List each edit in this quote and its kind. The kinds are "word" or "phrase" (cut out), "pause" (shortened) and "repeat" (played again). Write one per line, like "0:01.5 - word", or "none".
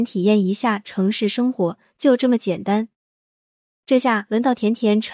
none